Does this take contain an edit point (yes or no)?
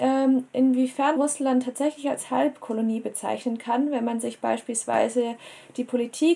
yes